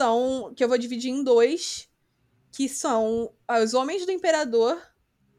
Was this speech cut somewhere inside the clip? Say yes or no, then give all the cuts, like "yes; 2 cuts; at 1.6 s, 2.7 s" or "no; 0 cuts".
no; 0 cuts